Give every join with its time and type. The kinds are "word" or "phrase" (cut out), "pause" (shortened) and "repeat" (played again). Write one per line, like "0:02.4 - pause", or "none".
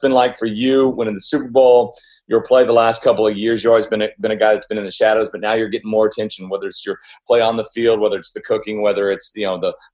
none